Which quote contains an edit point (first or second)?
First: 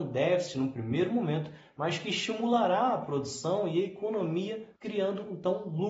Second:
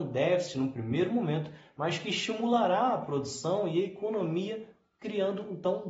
first